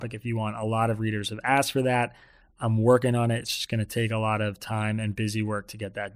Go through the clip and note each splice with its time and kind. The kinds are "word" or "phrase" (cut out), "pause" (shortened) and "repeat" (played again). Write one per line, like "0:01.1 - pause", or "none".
none